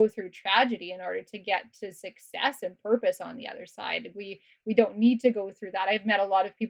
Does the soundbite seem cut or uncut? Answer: uncut